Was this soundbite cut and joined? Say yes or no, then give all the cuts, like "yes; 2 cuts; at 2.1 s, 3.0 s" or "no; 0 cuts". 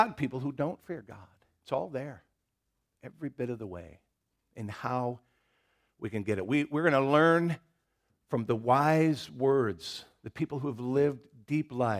no; 0 cuts